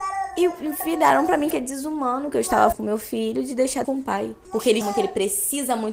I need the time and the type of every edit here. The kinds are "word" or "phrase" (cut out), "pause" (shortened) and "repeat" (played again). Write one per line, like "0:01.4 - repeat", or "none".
0:01.5 - word
0:02.7 - word
0:03.8 - word
0:04.8 - word